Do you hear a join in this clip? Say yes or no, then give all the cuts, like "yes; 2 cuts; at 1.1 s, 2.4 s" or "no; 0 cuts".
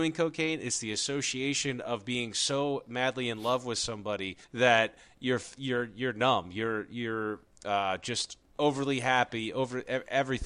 yes; 2 cuts; at 4.4 s, 8.5 s